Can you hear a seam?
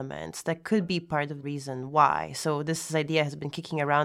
yes; 1 cut; at 1.4 s

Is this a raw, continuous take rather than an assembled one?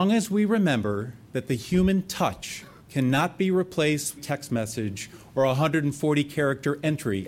no; 3 cuts; at 1.2 s, 2.8 s, 4.2 s

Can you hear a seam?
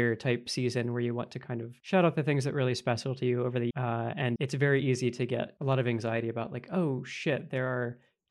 yes; 2 cuts; at 3.7 s, 4.4 s

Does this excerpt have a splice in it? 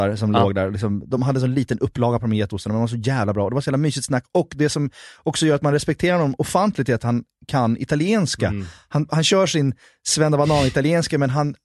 no; 0 cuts

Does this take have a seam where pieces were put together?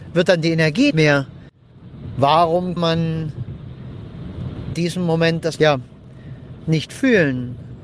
yes; 4 cuts; at 0.9 s, 2.8 s, 4.7 s, 5.6 s

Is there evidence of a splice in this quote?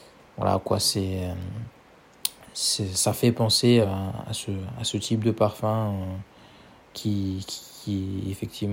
no; 0 cuts

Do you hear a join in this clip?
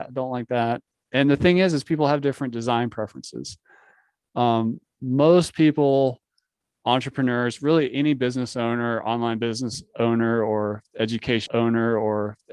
yes; 1 cut; at 11.5 s

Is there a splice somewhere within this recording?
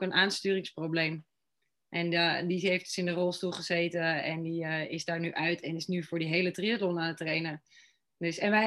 no; 0 cuts

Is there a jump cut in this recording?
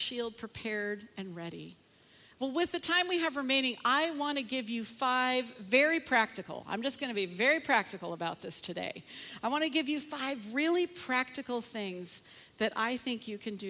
no; 0 cuts

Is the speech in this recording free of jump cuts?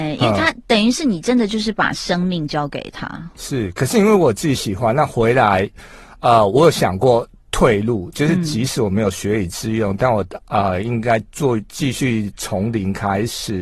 yes; 0 cuts

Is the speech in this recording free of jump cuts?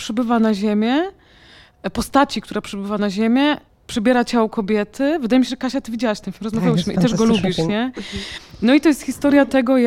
yes; 0 cuts

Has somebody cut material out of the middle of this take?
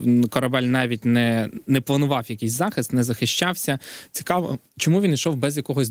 yes; 1 cut; at 4.7 s

